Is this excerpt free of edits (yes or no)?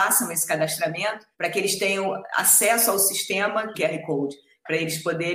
no